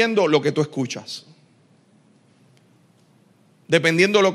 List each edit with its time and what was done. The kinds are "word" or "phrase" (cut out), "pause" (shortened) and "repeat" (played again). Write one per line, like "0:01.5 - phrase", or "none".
none